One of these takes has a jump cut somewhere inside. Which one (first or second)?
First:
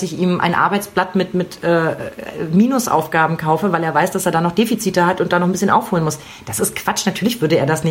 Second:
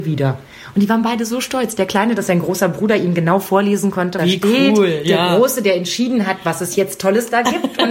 second